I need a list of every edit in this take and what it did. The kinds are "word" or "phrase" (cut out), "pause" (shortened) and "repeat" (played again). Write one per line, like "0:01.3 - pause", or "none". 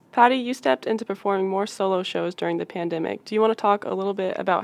none